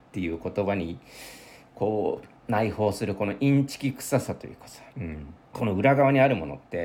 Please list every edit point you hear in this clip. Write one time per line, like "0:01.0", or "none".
0:02.4
0:04.9
0:05.4